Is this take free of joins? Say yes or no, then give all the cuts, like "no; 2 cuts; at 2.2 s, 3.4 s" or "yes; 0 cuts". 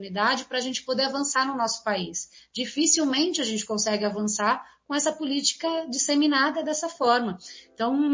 yes; 0 cuts